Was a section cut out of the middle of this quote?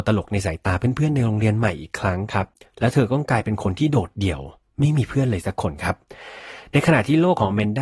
no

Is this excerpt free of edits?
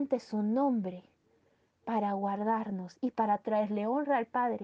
yes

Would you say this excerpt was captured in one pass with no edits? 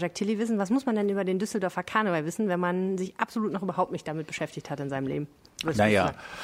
yes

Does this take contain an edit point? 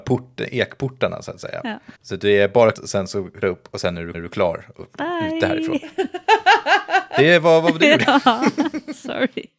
yes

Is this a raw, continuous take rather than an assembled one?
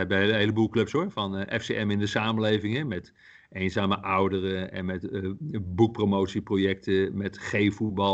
yes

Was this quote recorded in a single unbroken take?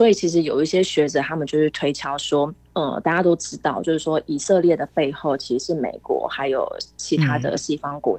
no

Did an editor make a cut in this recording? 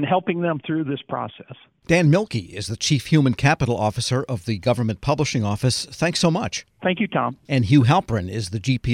no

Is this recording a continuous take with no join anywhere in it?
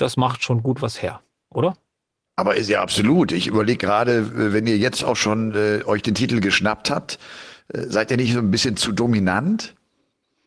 yes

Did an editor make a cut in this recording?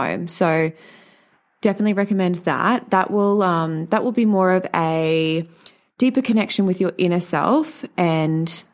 no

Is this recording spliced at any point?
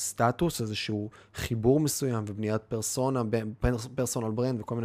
no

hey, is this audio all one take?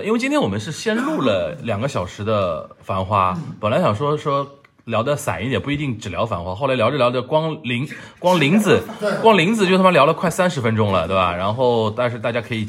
yes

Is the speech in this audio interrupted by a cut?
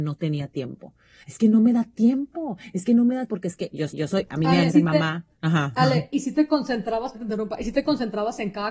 yes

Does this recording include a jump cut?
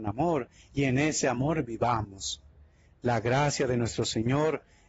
no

